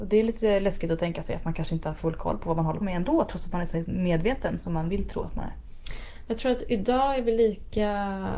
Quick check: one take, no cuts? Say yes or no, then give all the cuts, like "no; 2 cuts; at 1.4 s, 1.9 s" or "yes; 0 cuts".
no; 1 cut; at 2.8 s